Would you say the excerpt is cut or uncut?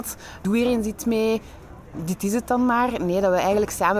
uncut